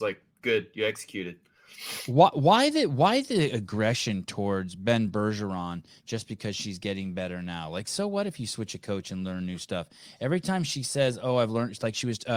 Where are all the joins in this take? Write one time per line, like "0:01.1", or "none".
none